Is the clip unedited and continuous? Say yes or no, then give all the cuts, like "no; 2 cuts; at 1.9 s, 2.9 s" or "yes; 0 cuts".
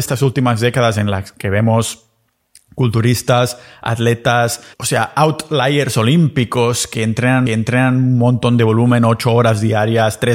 no; 2 cuts; at 4.7 s, 7.5 s